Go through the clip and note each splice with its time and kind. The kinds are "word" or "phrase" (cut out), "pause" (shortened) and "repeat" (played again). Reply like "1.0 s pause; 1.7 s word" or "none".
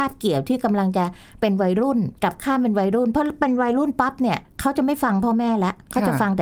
2.2 s pause